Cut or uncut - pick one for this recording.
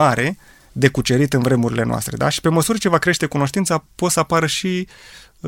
uncut